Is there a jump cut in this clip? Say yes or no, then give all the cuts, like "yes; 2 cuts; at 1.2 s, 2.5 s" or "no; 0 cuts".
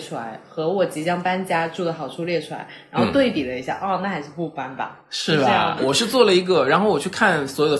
yes; 1 cut; at 5.8 s